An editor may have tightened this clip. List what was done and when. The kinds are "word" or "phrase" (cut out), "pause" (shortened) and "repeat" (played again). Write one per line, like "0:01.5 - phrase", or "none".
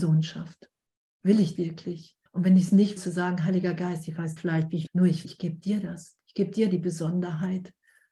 0:01.6 - word
0:02.3 - pause
0:03.0 - word
0:04.4 - phrase
0:04.9 - phrase
0:05.2 - word